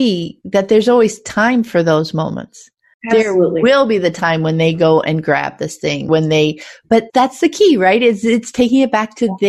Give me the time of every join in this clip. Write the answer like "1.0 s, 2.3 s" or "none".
2.9 s, 6.1 s, 7.1 s